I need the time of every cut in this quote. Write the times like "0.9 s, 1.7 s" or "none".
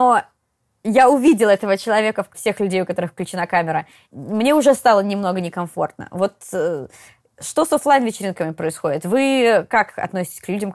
2.3 s